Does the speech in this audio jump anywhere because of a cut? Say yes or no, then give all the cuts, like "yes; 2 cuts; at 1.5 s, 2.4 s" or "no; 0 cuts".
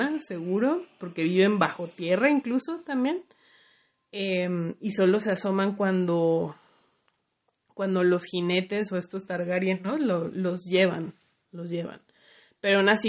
no; 0 cuts